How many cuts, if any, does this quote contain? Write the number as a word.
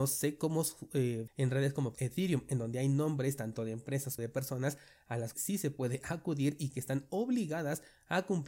four